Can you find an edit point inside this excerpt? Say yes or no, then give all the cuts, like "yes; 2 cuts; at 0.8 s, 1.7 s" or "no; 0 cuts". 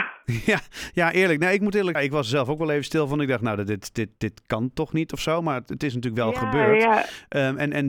yes; 1 cut; at 1.9 s